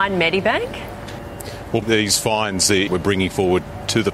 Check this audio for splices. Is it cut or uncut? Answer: cut